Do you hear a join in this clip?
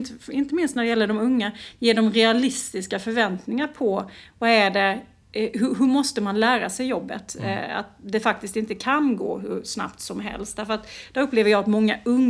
no; 0 cuts

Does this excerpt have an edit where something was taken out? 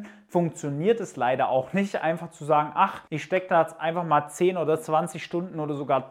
no; 0 cuts

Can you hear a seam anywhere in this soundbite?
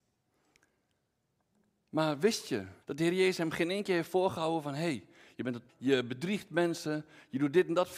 yes; 2 cuts; at 2.8 s, 5.7 s

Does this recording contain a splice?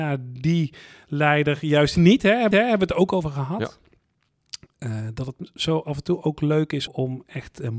yes; 3 cuts; at 2.0 s, 2.5 s, 6.9 s

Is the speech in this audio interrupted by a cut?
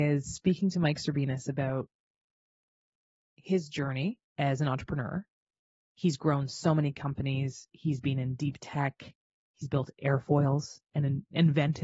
yes; 1 cut; at 4.3 s

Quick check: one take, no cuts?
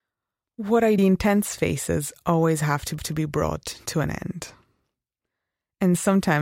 no; 2 cuts; at 1.0 s, 3.0 s

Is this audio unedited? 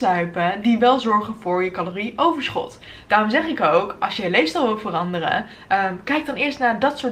yes; 0 cuts

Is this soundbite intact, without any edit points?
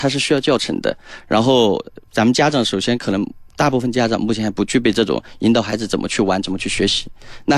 no; 1 cut; at 2.0 s

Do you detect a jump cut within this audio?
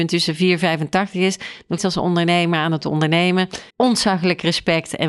yes; 2 cuts; at 1.8 s, 3.7 s

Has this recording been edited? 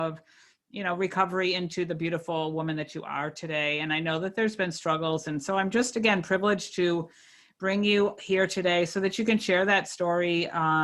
no; 0 cuts

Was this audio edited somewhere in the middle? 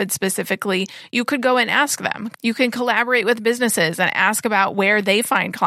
no; 0 cuts

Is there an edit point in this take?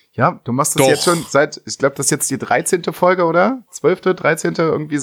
no; 0 cuts

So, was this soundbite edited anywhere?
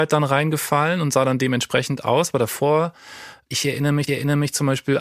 yes; 1 cut; at 4.1 s

